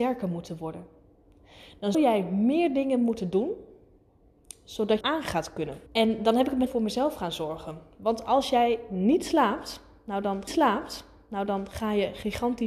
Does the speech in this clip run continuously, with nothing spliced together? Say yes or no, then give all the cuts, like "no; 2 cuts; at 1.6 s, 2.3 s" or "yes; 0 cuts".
no; 5 cuts; at 1.9 s, 5.0 s, 5.9 s, 6.7 s, 10.5 s